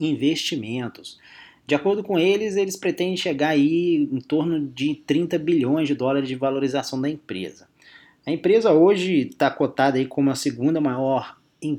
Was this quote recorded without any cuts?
yes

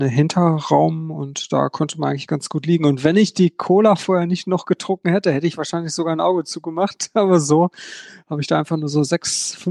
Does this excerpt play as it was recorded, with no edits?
yes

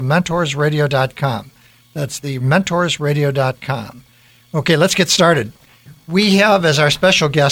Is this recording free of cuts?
yes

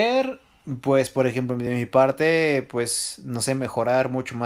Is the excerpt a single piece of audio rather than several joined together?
yes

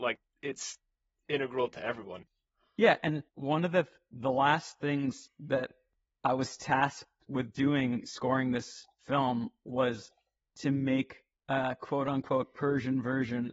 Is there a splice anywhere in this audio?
yes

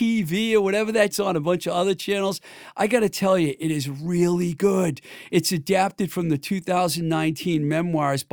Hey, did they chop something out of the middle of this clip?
yes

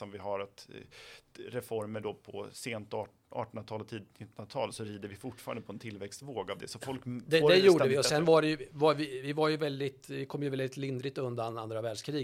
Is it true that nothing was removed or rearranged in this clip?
yes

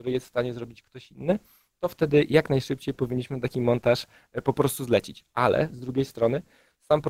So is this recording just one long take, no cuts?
yes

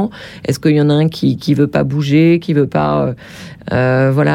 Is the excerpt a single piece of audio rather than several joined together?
yes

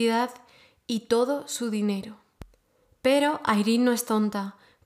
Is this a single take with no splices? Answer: yes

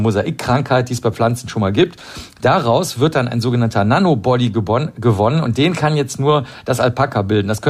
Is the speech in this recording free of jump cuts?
yes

